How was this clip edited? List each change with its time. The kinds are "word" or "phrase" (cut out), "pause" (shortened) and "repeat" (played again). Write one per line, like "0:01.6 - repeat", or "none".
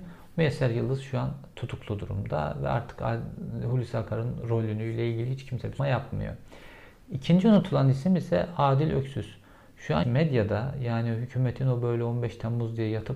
0:05.8 - word
0:10.0 - word